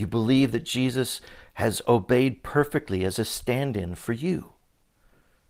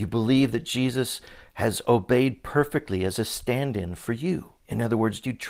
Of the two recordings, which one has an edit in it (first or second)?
second